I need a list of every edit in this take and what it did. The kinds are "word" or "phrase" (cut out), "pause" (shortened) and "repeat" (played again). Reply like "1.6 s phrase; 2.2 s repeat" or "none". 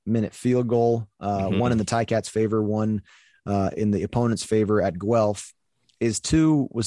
none